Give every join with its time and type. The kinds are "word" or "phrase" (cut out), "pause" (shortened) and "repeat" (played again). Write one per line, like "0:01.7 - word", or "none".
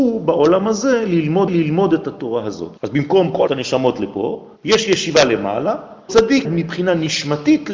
0:01.5 - repeat
0:02.8 - pause
0:03.5 - phrase
0:04.6 - pause
0:06.1 - word
0:06.4 - word

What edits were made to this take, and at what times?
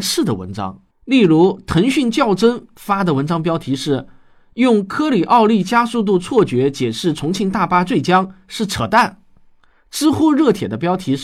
0:00.9 - pause

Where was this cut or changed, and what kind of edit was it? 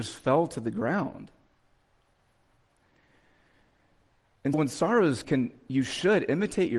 0:04.5 - word
0:05.2 - phrase

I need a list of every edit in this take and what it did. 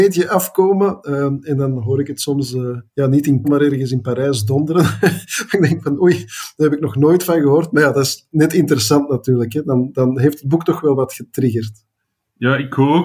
0:02.9 - pause
0:03.4 - word

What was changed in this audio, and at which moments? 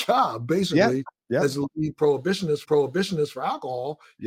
0:02.6 - repeat

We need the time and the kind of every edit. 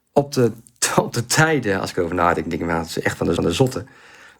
0:03.4 - repeat

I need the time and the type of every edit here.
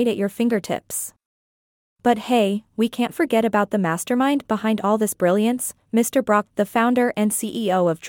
0:06.5 - word

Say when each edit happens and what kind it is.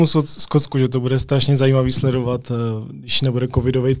none

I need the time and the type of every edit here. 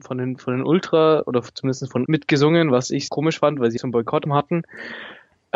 0:02.0 - word
0:03.1 - word
0:03.8 - word
0:04.3 - word

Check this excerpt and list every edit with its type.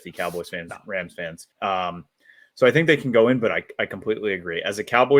0:01.5 - pause

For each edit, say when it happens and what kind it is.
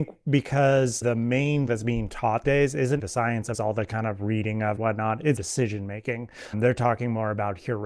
0:01.0 - word
0:01.7 - word
0:02.4 - word
0:03.0 - word
0:03.5 - word
0:04.8 - word
0:05.4 - word
0:06.5 - word

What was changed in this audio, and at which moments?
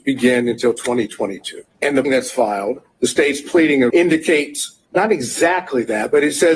0:01.7 - pause
0:02.0 - word
0:03.9 - word
0:04.8 - pause

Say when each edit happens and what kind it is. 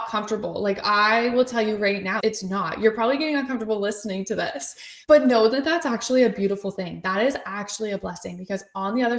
0:02.2 - word
0:05.0 - pause

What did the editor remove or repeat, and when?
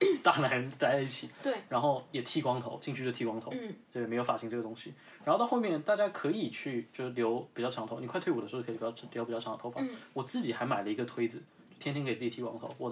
none

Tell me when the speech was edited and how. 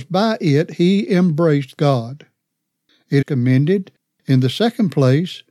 0:01.8 - phrase
0:03.2 - word

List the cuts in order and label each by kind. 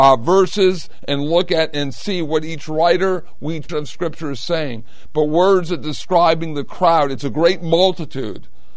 0:03.7 - word

